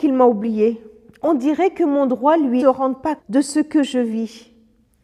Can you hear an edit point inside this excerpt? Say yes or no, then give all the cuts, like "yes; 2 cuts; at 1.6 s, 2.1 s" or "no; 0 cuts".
yes; 2 cuts; at 2.6 s, 3.2 s